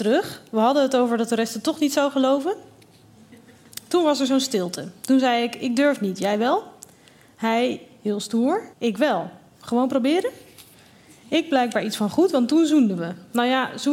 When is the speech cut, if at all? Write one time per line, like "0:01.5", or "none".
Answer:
0:08.7